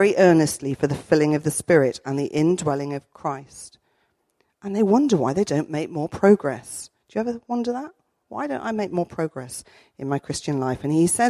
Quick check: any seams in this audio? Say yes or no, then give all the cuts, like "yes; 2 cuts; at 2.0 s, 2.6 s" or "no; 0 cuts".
no; 0 cuts